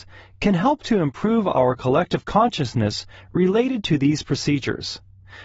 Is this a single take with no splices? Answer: yes; 0 cuts

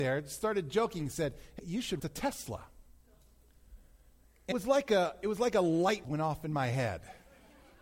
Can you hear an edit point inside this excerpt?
yes; 4 cuts; at 1.6 s, 2.0 s, 4.5 s, 6.0 s

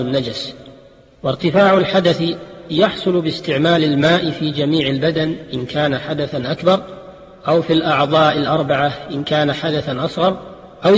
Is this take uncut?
yes; 0 cuts

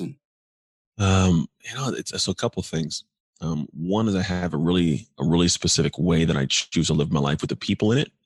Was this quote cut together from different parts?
no; 0 cuts

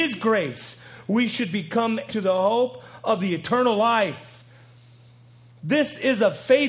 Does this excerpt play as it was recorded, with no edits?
no; 1 cut; at 2.1 s

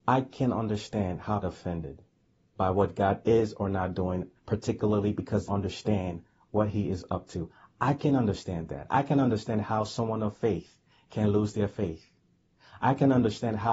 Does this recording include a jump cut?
yes; 3 cuts; at 1.4 s, 4.4 s, 5.5 s

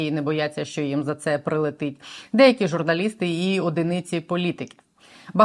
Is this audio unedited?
yes; 0 cuts

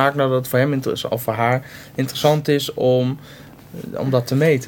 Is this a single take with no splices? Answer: yes; 0 cuts

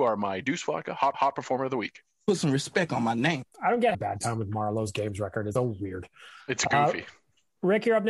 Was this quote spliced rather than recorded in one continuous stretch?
yes; 4 cuts; at 1.1 s, 3.5 s, 3.9 s, 5.6 s

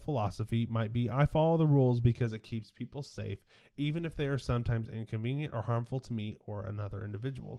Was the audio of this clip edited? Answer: no; 0 cuts

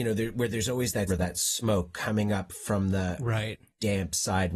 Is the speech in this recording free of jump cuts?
no; 1 cut; at 1.1 s

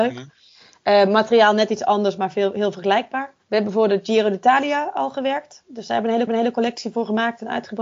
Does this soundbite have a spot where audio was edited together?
yes; 2 cuts; at 3.4 s, 6.3 s

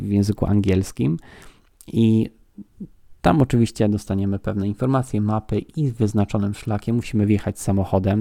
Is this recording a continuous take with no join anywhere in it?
yes; 0 cuts

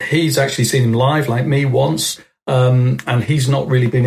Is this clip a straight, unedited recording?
yes; 0 cuts

